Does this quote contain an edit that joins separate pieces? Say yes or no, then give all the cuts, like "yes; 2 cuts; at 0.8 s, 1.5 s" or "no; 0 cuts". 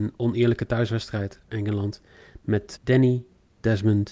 yes; 2 cuts; at 1.5 s, 2.8 s